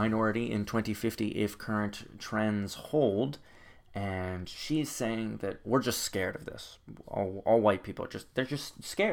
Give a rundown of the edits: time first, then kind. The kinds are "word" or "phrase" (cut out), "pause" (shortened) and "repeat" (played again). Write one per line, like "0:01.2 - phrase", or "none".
none